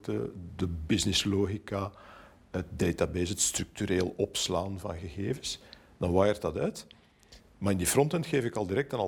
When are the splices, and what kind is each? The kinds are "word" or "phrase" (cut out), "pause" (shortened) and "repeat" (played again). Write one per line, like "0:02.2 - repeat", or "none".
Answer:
none